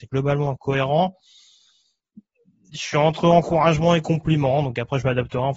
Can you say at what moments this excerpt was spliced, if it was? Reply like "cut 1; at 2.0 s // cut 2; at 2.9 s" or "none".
none